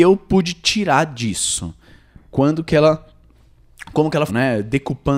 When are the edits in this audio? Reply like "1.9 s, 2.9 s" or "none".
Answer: 4.3 s

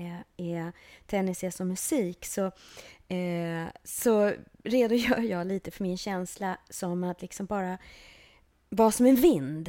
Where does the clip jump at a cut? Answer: none

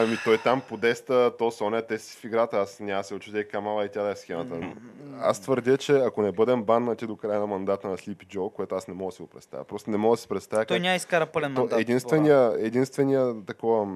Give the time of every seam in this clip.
4.6 s

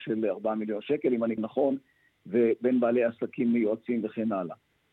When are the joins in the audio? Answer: 1.4 s

